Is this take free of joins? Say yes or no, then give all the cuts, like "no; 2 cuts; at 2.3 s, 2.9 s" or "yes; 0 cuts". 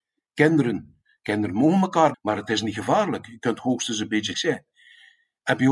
no; 2 cuts; at 2.1 s, 4.3 s